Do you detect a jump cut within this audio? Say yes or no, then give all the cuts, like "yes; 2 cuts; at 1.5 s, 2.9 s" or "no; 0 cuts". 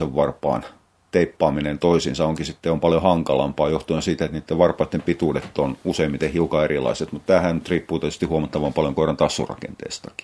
no; 0 cuts